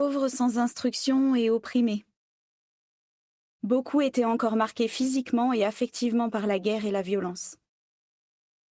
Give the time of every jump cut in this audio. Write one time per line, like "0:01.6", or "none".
none